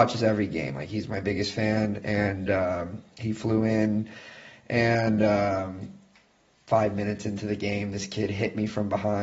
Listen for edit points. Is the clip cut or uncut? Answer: uncut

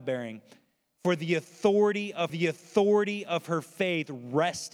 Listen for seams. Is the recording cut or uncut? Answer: cut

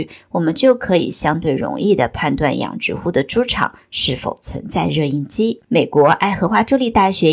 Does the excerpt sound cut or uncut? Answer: cut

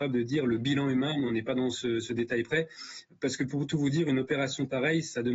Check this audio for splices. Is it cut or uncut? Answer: uncut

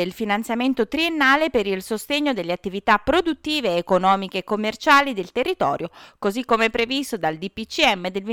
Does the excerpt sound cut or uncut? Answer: uncut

